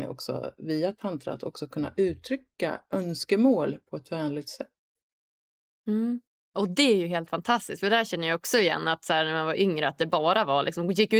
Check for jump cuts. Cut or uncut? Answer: uncut